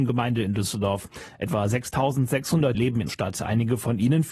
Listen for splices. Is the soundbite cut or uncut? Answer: cut